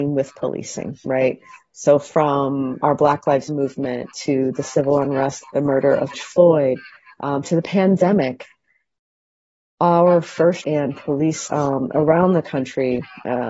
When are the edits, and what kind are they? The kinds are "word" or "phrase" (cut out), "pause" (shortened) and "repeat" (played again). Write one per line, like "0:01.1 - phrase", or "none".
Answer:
0:02.8 - word
0:03.5 - word
0:05.4 - word
0:06.1 - word
0:10.6 - word
0:11.5 - word